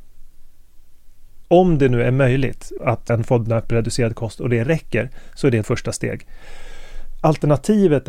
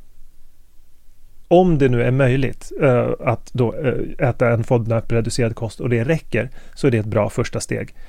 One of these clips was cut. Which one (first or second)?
first